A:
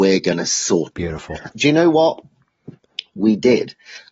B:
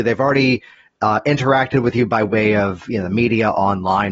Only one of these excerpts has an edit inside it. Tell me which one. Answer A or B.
A